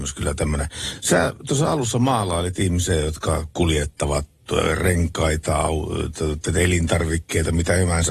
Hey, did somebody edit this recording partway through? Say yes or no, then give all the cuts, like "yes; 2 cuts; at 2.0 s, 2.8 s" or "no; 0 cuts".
no; 0 cuts